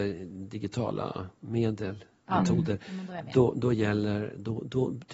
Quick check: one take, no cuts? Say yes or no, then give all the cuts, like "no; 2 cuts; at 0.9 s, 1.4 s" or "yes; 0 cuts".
yes; 0 cuts